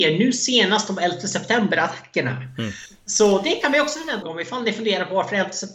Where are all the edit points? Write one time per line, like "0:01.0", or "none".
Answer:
0:04.2